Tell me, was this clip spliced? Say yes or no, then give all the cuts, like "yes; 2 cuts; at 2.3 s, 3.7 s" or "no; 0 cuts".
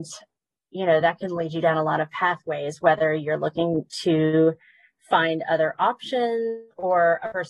no; 0 cuts